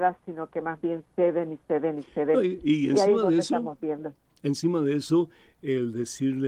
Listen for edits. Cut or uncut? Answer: uncut